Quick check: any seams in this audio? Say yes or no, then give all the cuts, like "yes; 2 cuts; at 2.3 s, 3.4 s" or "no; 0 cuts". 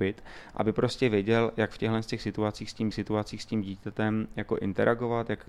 yes; 1 cut; at 2.9 s